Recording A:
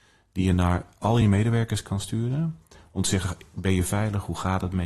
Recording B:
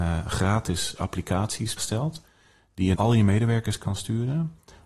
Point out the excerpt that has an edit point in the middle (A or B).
B